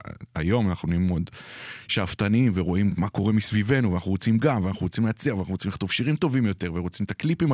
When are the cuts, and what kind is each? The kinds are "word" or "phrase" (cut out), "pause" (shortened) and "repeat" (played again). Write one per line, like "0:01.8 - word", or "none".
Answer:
none